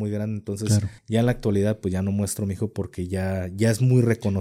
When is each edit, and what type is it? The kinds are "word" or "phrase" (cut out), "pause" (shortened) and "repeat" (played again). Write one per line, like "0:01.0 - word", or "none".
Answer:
0:01.0 - pause